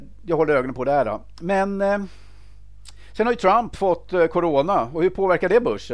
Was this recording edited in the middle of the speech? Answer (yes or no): no